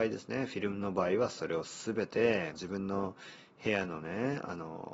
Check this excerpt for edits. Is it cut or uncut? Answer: cut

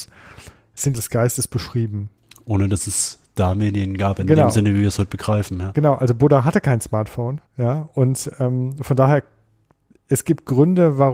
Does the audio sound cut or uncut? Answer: cut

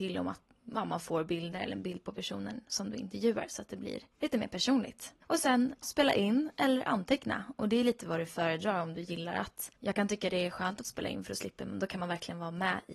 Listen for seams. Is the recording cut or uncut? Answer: cut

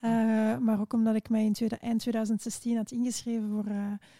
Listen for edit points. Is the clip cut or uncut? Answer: uncut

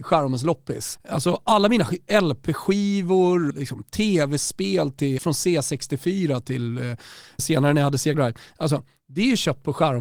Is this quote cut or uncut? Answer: cut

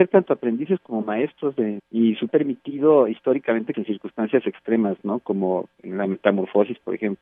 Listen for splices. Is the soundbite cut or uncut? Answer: cut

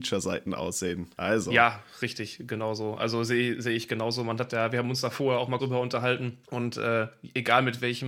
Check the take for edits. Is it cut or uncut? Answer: cut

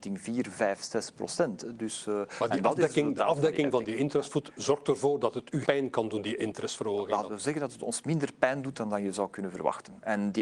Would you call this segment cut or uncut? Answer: cut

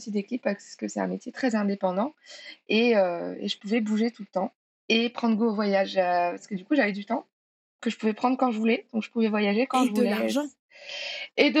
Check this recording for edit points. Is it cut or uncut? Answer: uncut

